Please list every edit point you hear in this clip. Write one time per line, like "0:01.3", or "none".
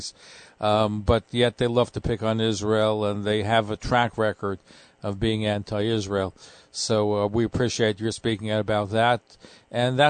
none